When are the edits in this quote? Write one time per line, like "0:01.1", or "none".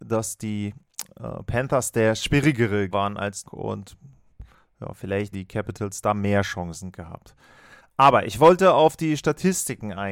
0:02.9
0:03.4
0:05.3